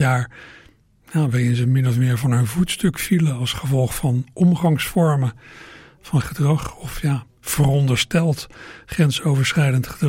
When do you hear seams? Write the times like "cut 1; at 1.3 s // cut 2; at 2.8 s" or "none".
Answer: cut 1; at 6.2 s